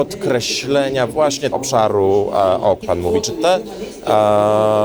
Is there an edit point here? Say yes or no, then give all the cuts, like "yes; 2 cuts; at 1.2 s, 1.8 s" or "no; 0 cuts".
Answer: yes; 2 cuts; at 1.5 s, 2.8 s